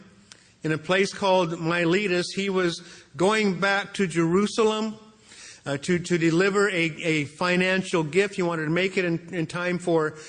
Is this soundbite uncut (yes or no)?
yes